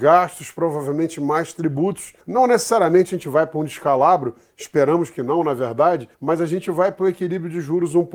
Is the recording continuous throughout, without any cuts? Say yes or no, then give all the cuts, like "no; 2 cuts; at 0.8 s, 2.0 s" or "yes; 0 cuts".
no; 2 cuts; at 2.2 s, 6.1 s